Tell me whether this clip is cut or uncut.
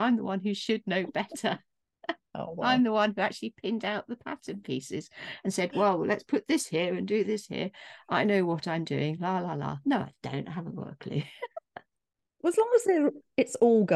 uncut